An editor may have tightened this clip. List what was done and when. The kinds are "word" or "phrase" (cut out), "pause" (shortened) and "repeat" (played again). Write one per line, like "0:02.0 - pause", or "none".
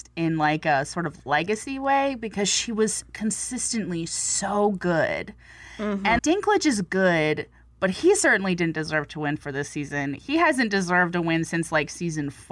0:06.2 - word

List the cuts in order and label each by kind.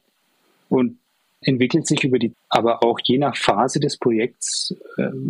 0:01.4 - word
0:02.3 - word

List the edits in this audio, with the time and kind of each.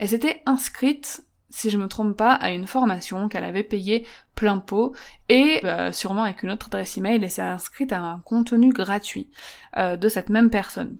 0:05.6 - phrase

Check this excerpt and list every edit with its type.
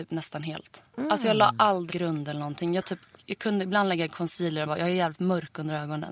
0:01.9 - word
0:04.7 - word

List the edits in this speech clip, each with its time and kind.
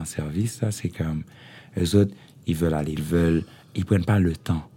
0:03.0 - phrase

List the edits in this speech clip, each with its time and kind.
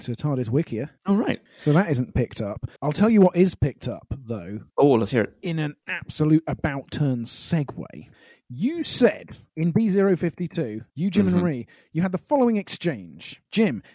0:02.8 - pause

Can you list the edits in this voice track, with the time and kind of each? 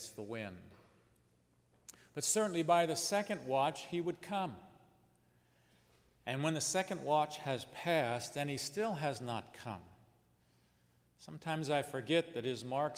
none

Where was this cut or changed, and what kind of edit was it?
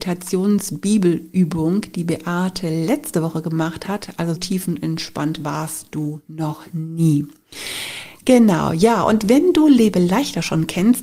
0:04.3 - word

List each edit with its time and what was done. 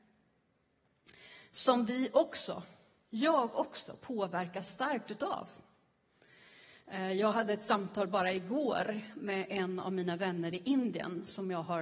none

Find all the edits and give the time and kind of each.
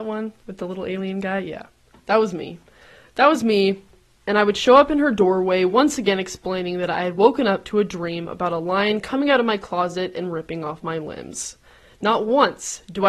none

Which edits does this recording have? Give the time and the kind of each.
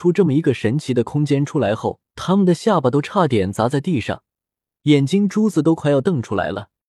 0:02.1 - pause

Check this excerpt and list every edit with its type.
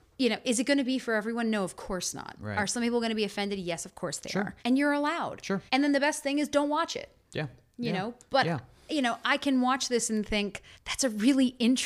0:04.6 - pause
0:05.7 - pause
0:10.7 - pause

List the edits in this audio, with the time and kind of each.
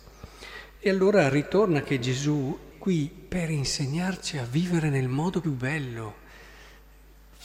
0:02.7 - word
0:05.4 - word

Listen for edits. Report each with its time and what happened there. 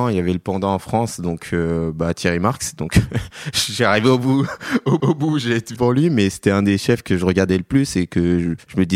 0:05.0 - repeat
0:05.8 - phrase

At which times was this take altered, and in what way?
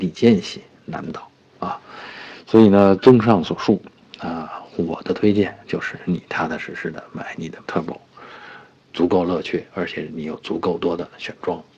0:07.6 - word

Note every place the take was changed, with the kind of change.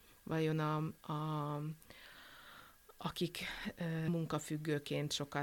0:04.1 - word

